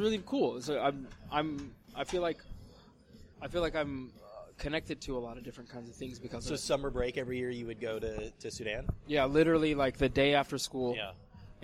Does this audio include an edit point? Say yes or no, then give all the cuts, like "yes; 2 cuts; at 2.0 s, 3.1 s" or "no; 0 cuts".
yes; 1 cut; at 3.3 s